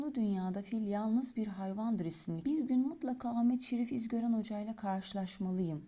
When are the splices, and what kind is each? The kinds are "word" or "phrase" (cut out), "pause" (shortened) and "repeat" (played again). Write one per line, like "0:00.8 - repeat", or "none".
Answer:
0:02.4 - phrase